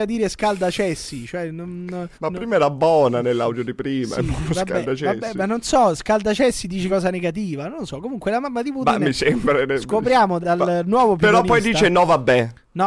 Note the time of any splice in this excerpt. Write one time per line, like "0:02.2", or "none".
0:02.1
0:06.9
0:10.4